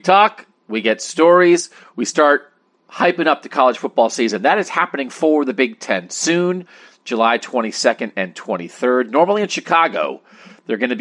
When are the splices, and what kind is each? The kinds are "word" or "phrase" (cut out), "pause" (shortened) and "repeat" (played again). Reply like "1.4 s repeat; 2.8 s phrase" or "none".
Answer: none

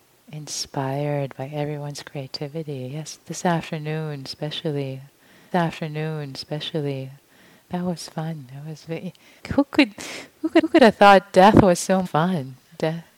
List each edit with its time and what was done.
5.5 s repeat; 9.4 s word; 10.6 s repeat; 12.0 s word

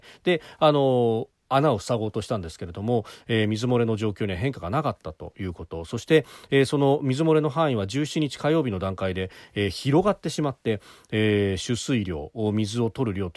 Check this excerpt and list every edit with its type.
none

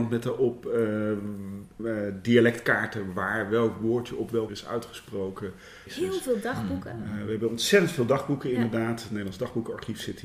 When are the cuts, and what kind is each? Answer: 4.5 s word

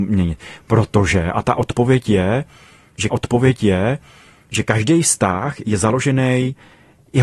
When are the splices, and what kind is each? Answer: 3.1 s repeat

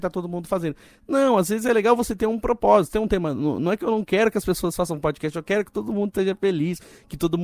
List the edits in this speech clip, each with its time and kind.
2.9 s word

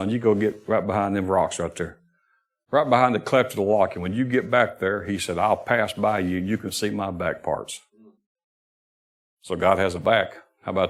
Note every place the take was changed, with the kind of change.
none

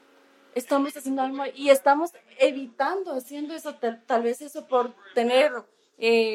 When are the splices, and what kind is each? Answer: none

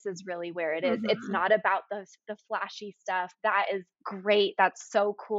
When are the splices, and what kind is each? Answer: 3.9 s pause

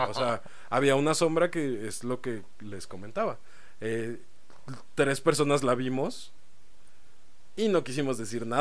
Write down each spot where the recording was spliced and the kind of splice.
none

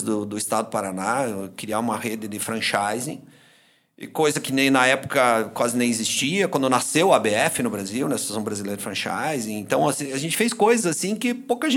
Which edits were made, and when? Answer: none

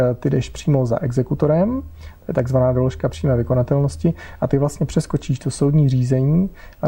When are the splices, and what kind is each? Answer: none

